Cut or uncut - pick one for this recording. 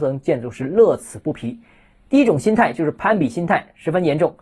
uncut